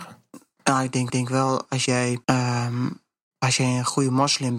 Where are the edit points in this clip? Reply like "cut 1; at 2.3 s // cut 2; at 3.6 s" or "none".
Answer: cut 1; at 1.1 s // cut 2; at 1.9 s // cut 3; at 2.2 s